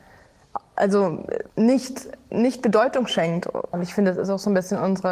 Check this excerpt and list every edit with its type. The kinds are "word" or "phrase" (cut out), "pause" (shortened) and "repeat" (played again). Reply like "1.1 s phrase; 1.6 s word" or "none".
1.5 s pause